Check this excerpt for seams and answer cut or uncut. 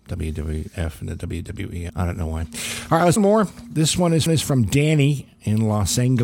cut